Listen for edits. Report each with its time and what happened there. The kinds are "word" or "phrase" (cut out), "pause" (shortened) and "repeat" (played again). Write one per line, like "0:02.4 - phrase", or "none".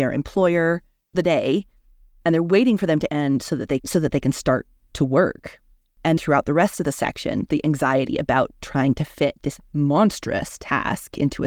0:01.1 - word
0:03.1 - word
0:03.8 - word
0:06.2 - word
0:07.5 - word

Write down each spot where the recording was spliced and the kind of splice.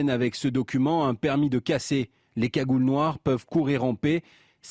none

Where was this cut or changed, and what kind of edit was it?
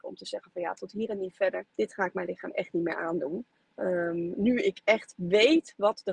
0:01.7 - pause
0:03.5 - pause

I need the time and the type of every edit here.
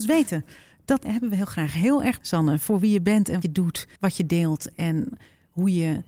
0:01.0 - word
0:02.2 - word
0:03.4 - word
0:04.0 - pause

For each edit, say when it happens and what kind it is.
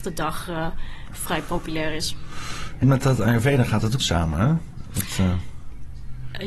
0:02.8 - word
0:04.0 - phrase

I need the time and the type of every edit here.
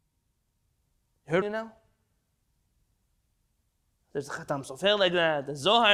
0:01.4 - phrase

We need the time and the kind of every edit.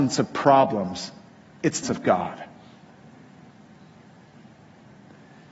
0:01.8 - word

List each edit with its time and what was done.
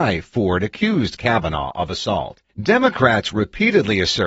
0:02.5 - pause

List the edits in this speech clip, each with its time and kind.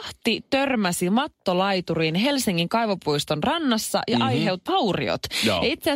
0:04.7 - word

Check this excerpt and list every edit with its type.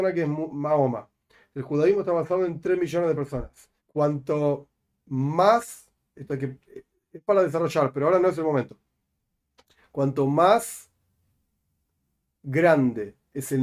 0:03.8 - pause

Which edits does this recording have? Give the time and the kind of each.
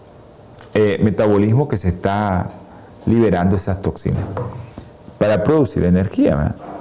none

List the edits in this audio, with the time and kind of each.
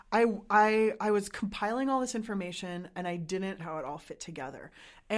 0:03.6 - word

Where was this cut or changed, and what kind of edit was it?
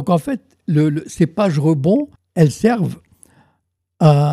0:02.1 - pause

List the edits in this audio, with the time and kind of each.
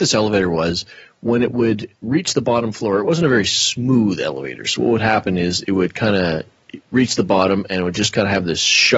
none

